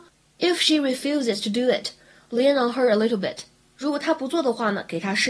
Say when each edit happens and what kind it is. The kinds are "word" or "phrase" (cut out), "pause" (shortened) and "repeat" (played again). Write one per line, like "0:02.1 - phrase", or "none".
none